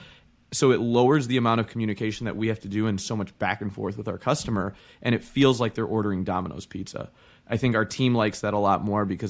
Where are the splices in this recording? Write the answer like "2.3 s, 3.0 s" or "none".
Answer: none